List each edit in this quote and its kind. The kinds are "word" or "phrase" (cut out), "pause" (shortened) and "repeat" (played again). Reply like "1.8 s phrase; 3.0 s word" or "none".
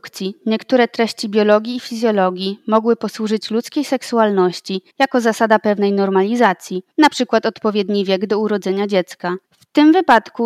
4.9 s pause; 6.9 s pause; 9.4 s pause